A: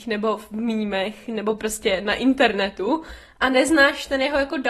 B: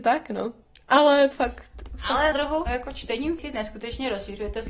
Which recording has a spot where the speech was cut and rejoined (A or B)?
B